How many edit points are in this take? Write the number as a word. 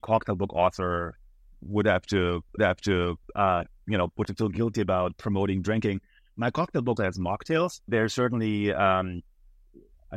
four